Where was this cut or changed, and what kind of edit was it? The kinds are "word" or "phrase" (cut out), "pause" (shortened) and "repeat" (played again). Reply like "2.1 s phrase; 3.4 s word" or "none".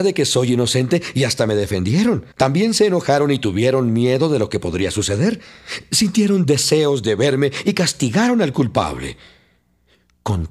2.3 s pause